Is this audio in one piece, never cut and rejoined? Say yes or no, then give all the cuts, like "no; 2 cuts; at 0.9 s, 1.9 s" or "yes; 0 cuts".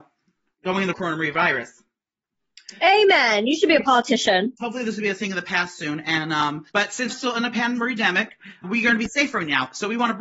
no; 5 cuts; at 0.9 s, 4.6 s, 6.7 s, 7.1 s, 8.6 s